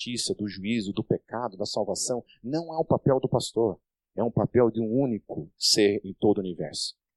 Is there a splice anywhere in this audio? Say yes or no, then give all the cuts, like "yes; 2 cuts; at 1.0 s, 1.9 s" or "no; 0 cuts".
no; 0 cuts